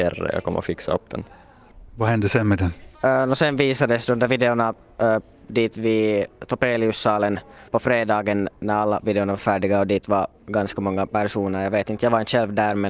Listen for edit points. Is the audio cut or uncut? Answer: cut